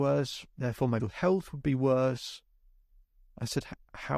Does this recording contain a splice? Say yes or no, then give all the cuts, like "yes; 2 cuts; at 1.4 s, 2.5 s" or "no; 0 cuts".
yes; 1 cut; at 1.0 s